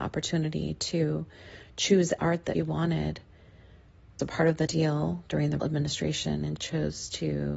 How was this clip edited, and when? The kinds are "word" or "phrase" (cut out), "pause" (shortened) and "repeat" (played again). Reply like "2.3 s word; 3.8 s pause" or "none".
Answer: 2.2 s word; 2.5 s word; 4.2 s word; 4.7 s word; 5.6 s word; 6.6 s word